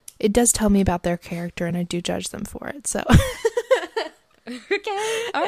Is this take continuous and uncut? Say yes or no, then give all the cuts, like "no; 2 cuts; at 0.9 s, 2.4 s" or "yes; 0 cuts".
yes; 0 cuts